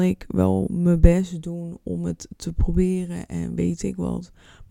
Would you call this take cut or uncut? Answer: uncut